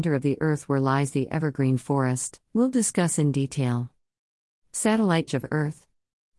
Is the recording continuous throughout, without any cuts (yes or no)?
no